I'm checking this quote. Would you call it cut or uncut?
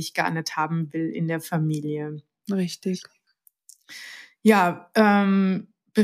uncut